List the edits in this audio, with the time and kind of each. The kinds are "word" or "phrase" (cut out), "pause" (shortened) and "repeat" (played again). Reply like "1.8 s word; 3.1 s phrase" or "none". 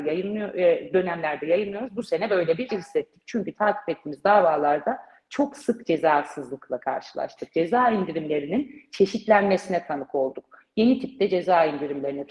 2.7 s word